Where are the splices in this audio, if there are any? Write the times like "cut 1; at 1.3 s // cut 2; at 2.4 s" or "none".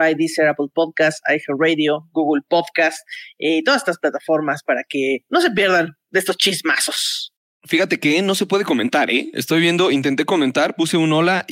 none